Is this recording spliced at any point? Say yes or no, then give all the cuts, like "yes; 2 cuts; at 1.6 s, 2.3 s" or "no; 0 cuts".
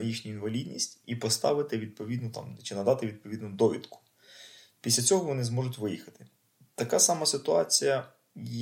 no; 0 cuts